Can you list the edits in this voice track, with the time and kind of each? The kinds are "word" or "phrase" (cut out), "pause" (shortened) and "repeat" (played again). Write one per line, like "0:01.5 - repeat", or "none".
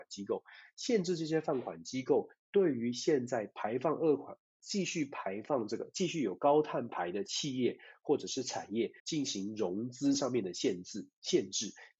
0:09.0 - pause